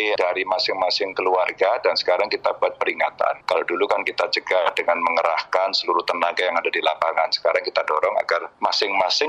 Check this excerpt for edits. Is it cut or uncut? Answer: uncut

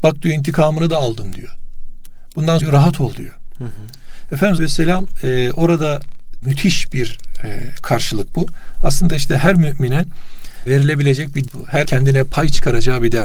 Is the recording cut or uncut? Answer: cut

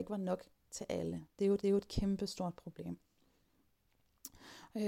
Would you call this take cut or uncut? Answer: cut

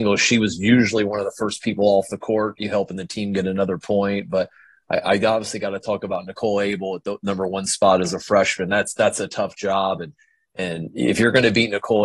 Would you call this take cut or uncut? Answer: uncut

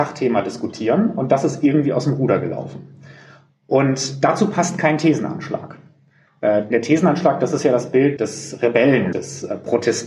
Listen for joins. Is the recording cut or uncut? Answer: cut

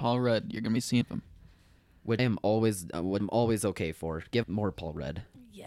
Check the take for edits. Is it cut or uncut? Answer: cut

